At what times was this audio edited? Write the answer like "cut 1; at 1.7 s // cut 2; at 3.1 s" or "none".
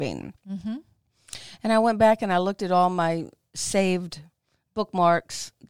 none